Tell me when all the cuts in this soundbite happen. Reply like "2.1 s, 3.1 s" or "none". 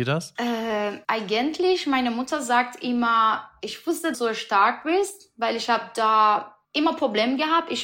1.0 s, 4.1 s, 6.6 s